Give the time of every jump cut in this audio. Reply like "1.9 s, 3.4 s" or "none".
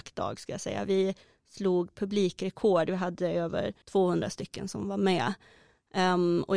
3.8 s